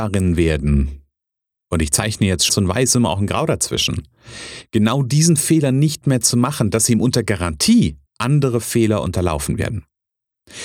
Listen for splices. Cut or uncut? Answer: cut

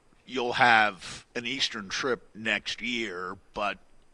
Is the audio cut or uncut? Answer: cut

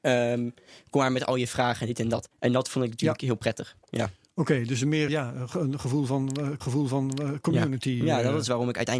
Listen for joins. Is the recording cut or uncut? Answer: cut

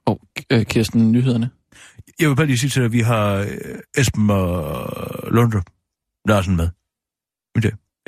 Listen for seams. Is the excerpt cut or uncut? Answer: uncut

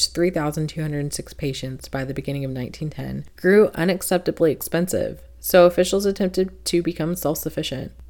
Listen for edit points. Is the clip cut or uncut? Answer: uncut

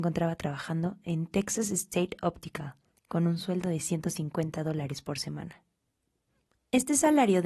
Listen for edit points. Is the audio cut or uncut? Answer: uncut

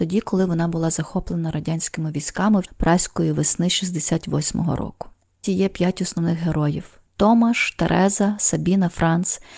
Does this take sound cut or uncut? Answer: cut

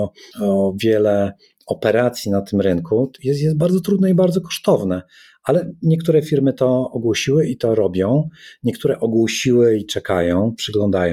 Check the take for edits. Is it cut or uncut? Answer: uncut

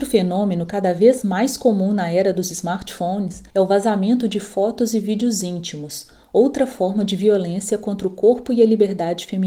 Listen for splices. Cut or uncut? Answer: cut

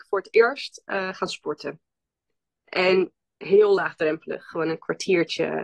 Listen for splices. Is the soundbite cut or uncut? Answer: uncut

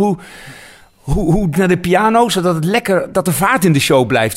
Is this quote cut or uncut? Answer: cut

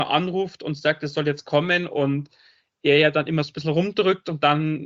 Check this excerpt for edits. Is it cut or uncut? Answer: uncut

